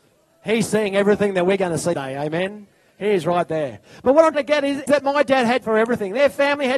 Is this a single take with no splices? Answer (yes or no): no